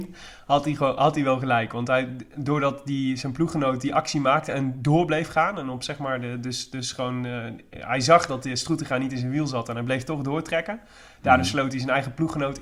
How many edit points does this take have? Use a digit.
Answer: 0